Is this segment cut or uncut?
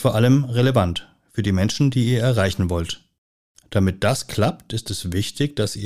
uncut